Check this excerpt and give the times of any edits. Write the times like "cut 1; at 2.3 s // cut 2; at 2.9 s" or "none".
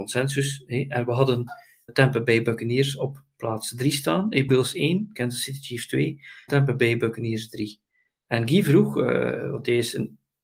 cut 1; at 1.9 s // cut 2; at 4.5 s // cut 3; at 6.5 s

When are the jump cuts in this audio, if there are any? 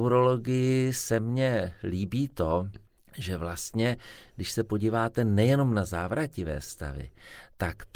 cut 1; at 2.9 s

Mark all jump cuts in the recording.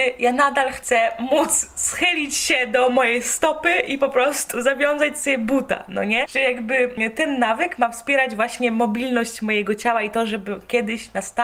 none

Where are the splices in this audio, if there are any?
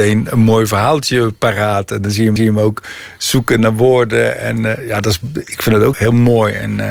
cut 1; at 2.4 s // cut 2; at 5.9 s

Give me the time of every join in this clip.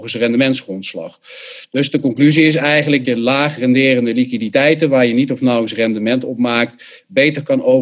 cut 1; at 3.0 s

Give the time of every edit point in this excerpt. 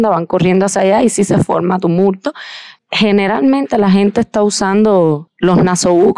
none

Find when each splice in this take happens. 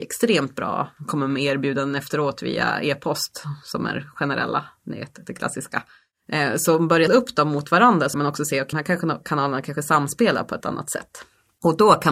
cut 1; at 7.1 s // cut 2; at 8.1 s // cut 3; at 8.7 s // cut 4; at 10.6 s

